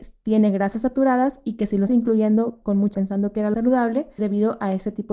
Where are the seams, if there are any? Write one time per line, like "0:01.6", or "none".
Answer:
0:01.9
0:02.9
0:03.5
0:04.2

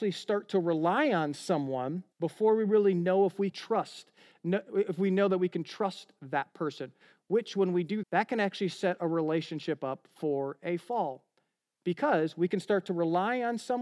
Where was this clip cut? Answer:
0:02.1
0:03.5
0:08.0

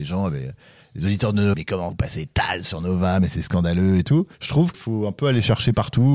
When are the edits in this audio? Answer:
0:01.5
0:01.9
0:04.3
0:04.7

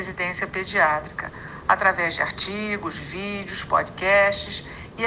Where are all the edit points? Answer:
none

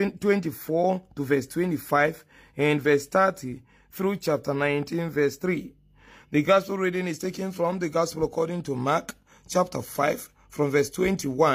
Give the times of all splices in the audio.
none

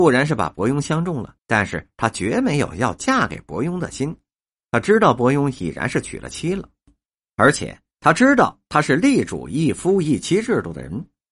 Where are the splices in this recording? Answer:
0:01.4

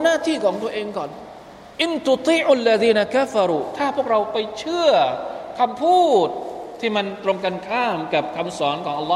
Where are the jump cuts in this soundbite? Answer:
0:01.7

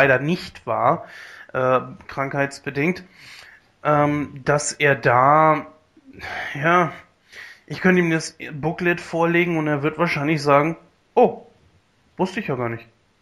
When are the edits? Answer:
none

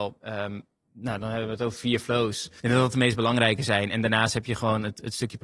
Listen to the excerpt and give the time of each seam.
0:02.6

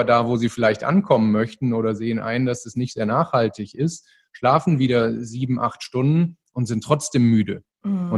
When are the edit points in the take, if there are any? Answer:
none

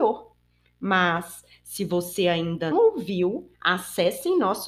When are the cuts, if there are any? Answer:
0:02.7
0:03.5

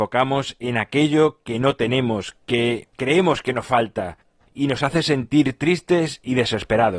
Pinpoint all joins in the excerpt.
none

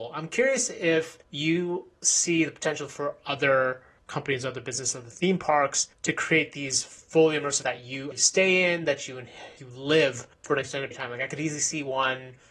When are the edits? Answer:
0:01.2
0:04.0
0:05.9
0:07.6
0:08.1
0:09.6
0:10.3
0:10.9

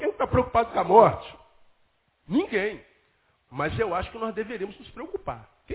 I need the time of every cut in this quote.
none

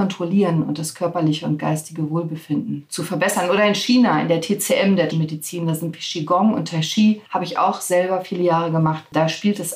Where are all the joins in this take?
0:05.1
0:05.9
0:07.3

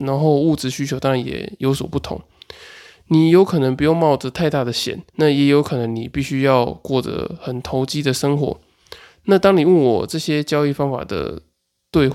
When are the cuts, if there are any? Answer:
0:05.1

